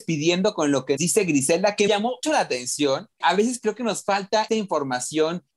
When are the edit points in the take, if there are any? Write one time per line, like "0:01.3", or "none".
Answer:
0:01.0
0:01.9
0:02.2
0:03.2
0:04.5

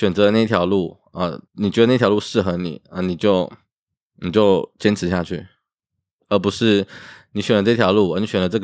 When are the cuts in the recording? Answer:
0:01.5

